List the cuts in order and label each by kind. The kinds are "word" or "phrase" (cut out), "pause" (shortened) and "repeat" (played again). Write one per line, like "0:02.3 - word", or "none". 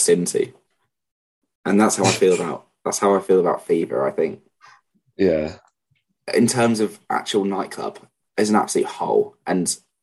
none